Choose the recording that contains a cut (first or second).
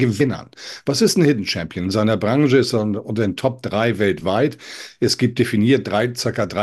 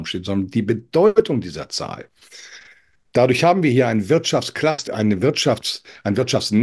second